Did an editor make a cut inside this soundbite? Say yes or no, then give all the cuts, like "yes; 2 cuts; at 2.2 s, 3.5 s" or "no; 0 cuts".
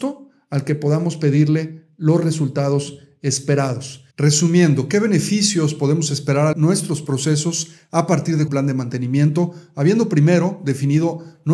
yes; 3 cuts; at 4.1 s, 6.5 s, 8.5 s